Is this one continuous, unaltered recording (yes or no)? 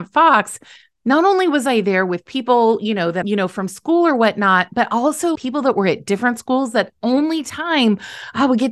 no